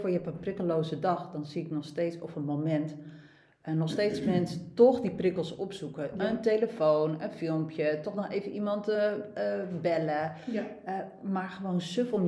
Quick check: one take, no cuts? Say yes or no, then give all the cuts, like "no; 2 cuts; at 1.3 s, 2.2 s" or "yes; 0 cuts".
yes; 0 cuts